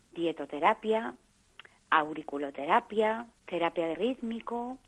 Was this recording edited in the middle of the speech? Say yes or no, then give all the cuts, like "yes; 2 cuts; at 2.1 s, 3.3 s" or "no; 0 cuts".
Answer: yes; 2 cuts; at 3.4 s, 3.9 s